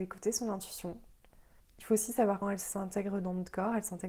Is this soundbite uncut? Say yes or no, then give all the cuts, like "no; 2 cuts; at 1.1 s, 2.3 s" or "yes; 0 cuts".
no; 2 cuts; at 1.6 s, 2.4 s